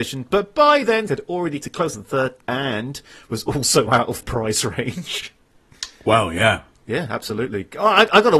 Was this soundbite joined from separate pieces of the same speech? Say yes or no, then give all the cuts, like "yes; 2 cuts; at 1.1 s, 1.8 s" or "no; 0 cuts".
yes; 6 cuts; at 1.1 s, 1.6 s, 1.9 s, 2.4 s, 3.9 s, 4.2 s